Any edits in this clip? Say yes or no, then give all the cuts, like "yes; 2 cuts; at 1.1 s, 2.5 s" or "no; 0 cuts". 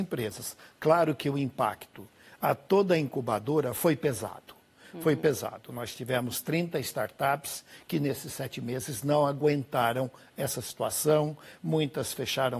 no; 0 cuts